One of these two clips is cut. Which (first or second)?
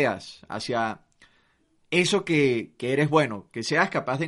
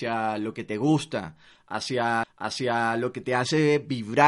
second